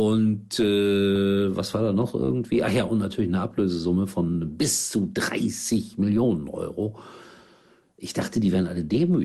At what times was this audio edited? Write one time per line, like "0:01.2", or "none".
none